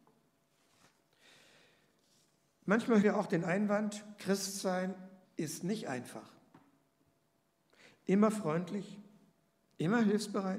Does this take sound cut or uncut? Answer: cut